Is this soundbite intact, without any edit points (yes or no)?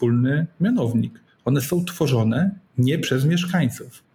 yes